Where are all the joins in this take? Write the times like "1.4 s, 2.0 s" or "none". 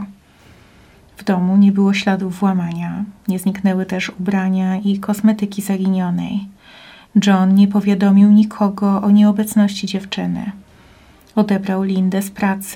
none